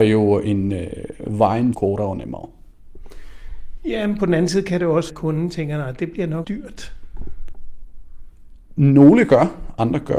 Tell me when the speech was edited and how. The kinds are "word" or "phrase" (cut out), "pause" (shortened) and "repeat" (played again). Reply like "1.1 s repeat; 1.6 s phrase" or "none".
1.7 s phrase; 5.1 s phrase; 6.4 s word